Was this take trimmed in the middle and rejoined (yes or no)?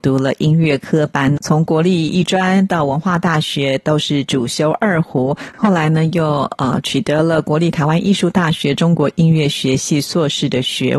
yes